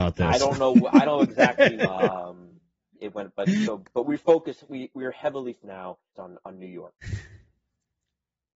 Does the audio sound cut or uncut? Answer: cut